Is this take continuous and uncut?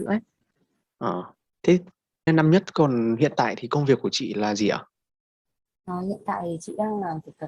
no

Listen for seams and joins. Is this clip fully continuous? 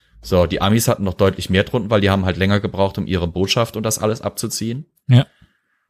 yes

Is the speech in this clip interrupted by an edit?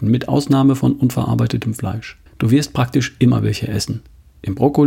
yes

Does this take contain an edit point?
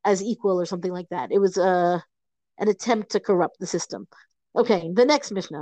no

